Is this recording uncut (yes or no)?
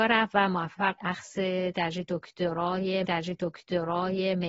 no